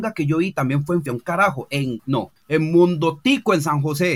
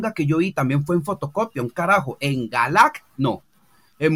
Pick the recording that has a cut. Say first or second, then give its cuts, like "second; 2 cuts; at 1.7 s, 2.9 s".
first; 3 cuts; at 1.1 s, 2.0 s, 2.4 s